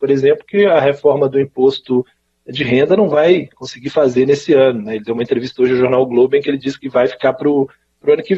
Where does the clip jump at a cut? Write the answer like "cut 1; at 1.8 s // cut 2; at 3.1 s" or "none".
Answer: none